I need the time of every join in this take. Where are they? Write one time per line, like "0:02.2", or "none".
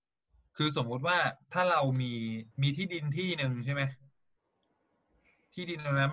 0:02.5

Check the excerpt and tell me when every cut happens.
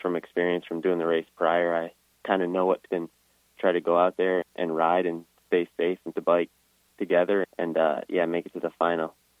0:02.9
0:03.6
0:04.4
0:06.1
0:07.4

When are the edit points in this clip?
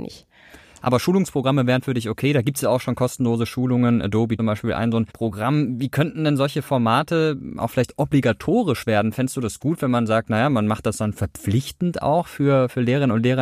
0:04.4
0:05.1

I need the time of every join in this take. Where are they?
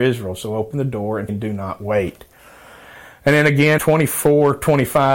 0:01.3
0:03.8

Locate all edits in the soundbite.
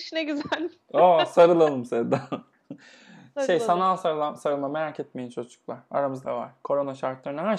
0:06.2

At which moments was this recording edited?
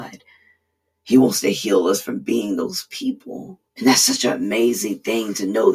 0:03.7

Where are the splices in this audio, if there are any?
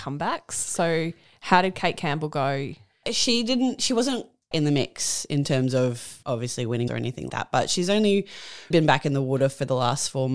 0:04.5
0:06.9
0:07.3
0:08.7

